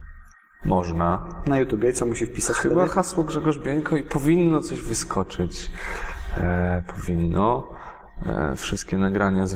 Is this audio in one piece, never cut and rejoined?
yes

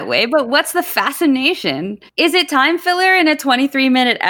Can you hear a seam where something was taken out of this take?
yes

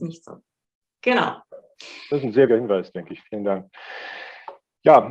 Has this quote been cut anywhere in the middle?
yes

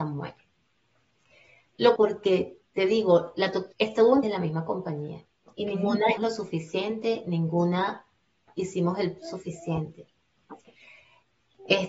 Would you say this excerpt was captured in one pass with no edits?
no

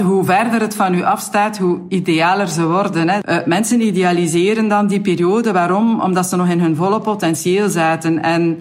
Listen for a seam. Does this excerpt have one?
no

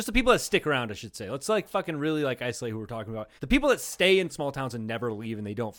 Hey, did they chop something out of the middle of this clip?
yes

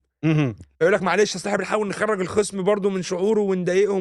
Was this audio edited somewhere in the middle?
no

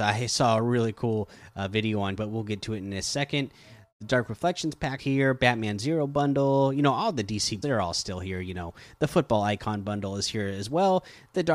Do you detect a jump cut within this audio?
yes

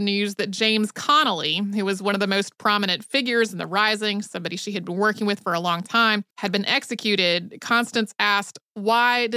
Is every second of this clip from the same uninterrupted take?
no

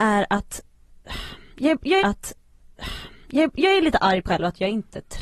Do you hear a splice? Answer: yes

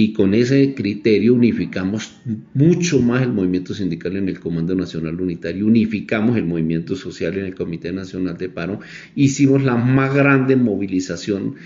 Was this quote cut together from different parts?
no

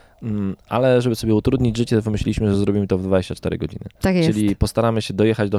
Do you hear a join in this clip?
no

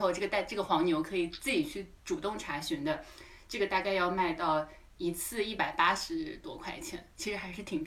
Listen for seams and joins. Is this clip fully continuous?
yes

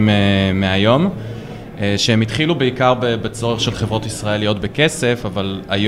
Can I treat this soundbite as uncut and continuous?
yes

